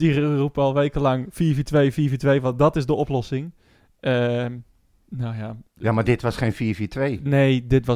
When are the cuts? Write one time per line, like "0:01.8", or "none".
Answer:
none